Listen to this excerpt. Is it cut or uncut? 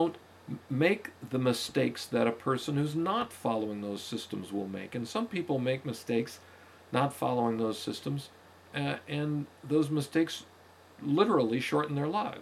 uncut